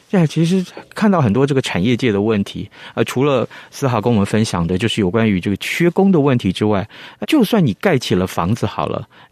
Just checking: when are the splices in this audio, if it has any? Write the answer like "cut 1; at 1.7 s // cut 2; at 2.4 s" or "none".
cut 1; at 7.2 s